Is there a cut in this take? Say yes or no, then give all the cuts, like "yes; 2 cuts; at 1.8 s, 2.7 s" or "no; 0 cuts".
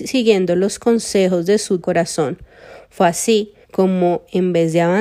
yes; 2 cuts; at 1.8 s, 3.6 s